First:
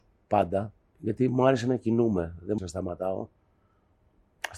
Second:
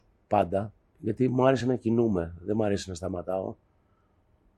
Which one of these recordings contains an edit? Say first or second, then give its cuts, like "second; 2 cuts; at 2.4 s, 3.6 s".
first; 1 cut; at 2.6 s